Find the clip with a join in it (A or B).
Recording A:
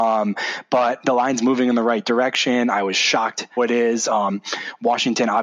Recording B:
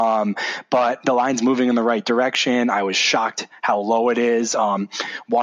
A